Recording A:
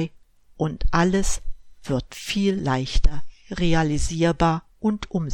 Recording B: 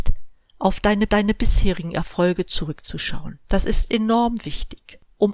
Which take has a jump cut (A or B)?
B